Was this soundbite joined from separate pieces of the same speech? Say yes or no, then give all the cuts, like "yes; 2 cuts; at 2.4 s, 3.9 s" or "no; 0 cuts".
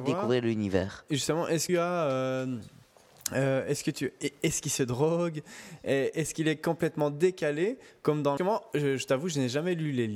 yes; 2 cuts; at 1.7 s, 8.4 s